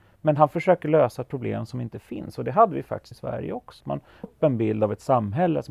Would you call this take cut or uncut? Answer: cut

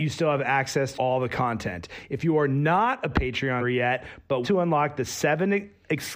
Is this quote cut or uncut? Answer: cut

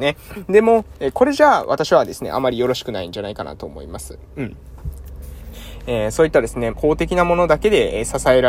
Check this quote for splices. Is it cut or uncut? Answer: cut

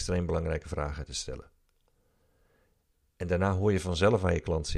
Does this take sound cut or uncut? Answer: uncut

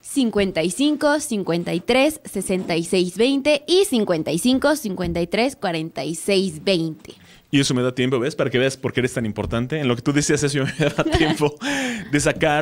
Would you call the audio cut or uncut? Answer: uncut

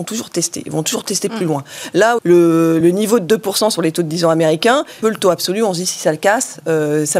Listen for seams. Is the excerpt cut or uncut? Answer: cut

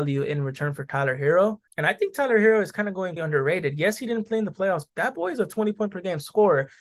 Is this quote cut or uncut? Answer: cut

